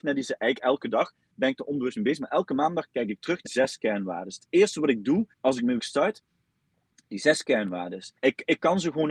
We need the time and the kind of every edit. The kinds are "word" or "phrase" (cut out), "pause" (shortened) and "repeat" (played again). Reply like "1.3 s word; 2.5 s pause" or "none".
3.5 s word; 5.3 s pause; 5.8 s word; 8.2 s pause